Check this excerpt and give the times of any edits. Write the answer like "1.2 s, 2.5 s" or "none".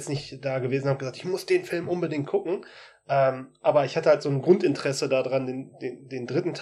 none

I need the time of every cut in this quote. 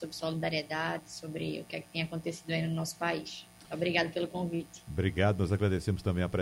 none

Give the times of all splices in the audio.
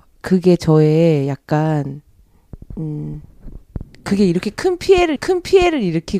2.7 s, 5.2 s

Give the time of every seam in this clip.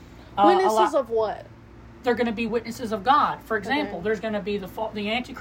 none

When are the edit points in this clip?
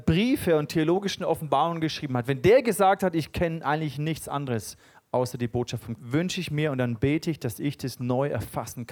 6.0 s

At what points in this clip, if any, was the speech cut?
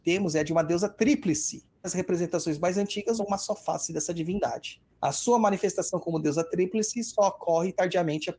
1.8 s, 3.2 s, 4.9 s

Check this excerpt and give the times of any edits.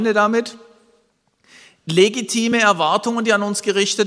none

